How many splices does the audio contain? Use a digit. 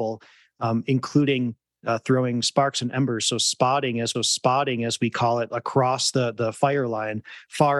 1